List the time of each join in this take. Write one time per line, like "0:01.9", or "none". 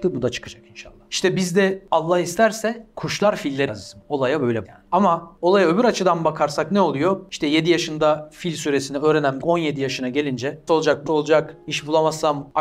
0:03.7
0:04.6
0:09.4
0:10.7
0:11.1